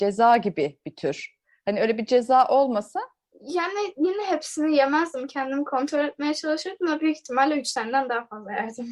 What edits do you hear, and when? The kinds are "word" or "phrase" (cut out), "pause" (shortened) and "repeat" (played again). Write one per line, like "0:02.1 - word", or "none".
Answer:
none